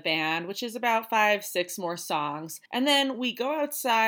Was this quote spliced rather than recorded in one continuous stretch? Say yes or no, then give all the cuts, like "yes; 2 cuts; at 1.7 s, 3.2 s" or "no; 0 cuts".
yes; 1 cut; at 2.7 s